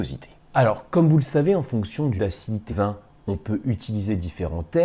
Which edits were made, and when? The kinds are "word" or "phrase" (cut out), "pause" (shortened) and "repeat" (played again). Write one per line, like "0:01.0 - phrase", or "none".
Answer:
0:02.2 - word
0:02.7 - word